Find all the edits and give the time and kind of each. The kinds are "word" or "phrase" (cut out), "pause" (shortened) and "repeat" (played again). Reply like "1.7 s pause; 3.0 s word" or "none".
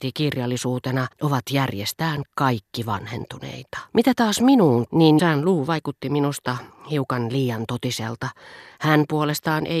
1.1 s pause; 3.9 s pause; 4.9 s word; 5.2 s word